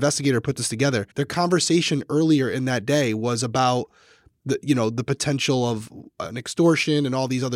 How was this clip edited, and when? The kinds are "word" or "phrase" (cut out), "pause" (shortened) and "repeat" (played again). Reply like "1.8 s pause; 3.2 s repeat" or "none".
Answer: 1.1 s pause